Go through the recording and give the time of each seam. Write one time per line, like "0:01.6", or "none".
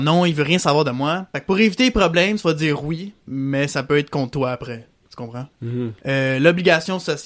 none